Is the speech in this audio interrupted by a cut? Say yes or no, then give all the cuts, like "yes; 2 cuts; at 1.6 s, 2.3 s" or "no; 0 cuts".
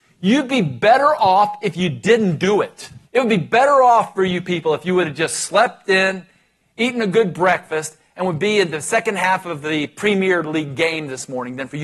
yes; 1 cut; at 3.1 s